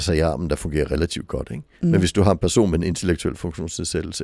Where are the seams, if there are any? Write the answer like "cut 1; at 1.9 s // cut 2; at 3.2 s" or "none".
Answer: cut 1; at 1.7 s

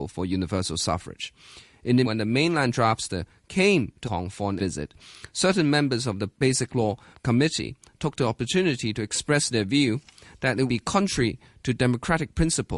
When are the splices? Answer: cut 1; at 2.0 s // cut 2; at 4.0 s // cut 3; at 4.6 s // cut 4; at 7.1 s // cut 5; at 10.7 s

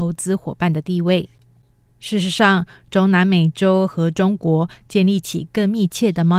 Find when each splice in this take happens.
none

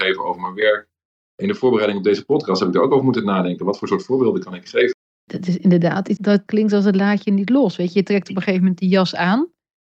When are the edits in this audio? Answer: cut 1; at 6.2 s

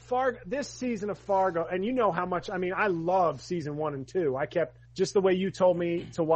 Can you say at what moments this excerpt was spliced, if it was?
cut 1; at 4.9 s

